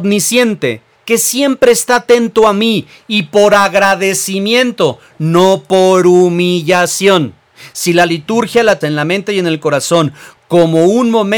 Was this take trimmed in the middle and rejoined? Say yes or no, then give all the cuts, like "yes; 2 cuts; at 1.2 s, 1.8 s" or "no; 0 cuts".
yes; 2 cuts; at 0.9 s, 8.8 s